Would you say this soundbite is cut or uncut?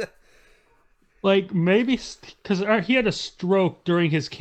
uncut